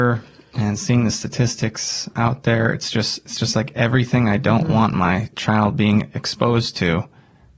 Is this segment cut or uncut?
uncut